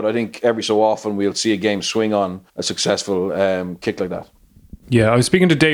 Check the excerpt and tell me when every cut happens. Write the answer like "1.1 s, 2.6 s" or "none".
2.5 s